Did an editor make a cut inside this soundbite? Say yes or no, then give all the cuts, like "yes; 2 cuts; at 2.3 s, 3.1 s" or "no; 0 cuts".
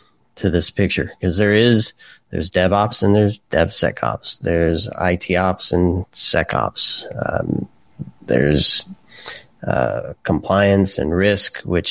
yes; 1 cut; at 3.4 s